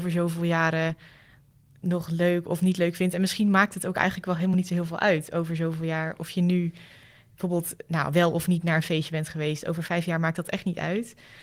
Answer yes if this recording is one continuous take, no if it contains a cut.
yes